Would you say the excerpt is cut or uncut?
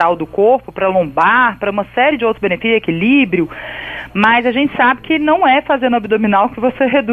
uncut